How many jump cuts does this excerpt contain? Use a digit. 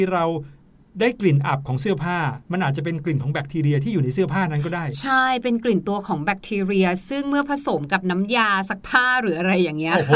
1